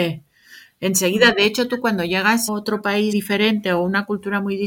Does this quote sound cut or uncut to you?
cut